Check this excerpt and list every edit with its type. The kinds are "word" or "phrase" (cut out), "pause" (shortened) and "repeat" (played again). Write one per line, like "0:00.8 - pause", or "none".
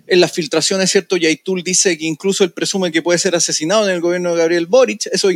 none